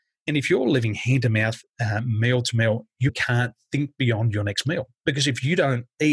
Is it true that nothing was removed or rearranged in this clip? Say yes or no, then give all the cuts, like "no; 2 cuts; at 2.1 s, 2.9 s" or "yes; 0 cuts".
no; 1 cut; at 3.1 s